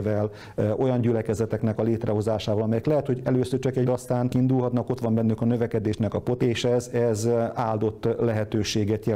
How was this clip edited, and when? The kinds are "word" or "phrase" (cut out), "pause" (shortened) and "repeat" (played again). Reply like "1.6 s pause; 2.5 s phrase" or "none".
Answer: 3.8 s word; 4.3 s word; 6.4 s word